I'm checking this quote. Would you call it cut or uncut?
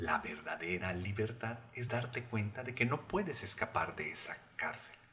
uncut